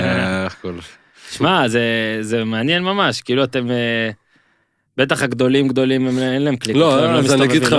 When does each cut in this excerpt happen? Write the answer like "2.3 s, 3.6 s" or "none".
none